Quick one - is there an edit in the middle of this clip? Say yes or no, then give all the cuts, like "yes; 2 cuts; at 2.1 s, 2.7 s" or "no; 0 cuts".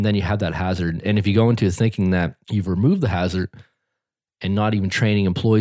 yes; 1 cut; at 2.4 s